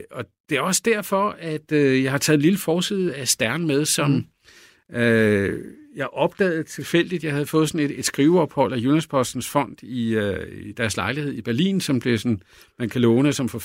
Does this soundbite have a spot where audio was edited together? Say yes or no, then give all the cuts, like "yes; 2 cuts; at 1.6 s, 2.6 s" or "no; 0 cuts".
no; 0 cuts